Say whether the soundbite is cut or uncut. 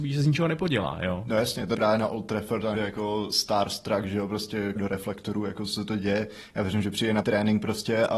cut